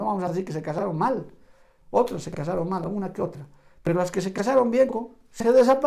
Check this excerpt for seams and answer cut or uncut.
uncut